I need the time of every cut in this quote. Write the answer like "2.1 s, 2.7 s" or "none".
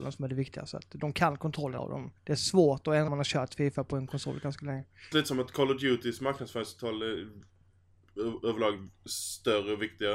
1.8 s, 2.2 s, 3.1 s, 5.1 s